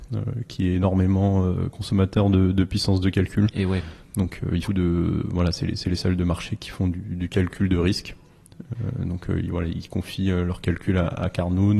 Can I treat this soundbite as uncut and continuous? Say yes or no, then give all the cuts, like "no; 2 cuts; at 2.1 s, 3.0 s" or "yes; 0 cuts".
no; 1 cut; at 4.7 s